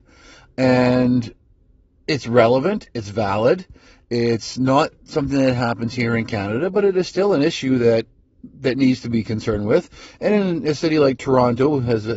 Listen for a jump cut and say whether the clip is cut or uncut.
uncut